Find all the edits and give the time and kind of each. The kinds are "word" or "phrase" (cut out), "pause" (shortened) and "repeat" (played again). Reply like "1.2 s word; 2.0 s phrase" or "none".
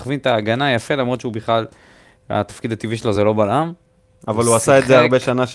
none